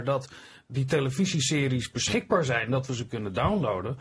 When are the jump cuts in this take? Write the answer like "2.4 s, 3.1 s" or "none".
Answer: none